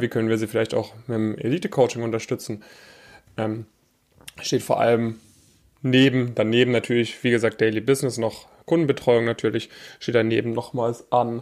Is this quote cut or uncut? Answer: uncut